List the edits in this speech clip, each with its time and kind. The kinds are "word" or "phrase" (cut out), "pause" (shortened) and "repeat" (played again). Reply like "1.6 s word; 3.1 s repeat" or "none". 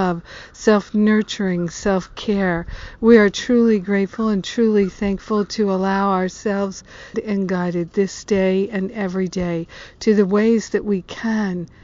7.1 s phrase